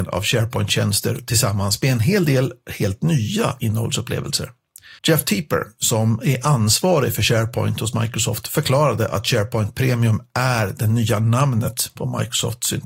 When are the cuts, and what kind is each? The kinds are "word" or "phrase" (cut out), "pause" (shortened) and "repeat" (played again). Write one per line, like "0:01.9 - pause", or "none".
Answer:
0:05.0 - pause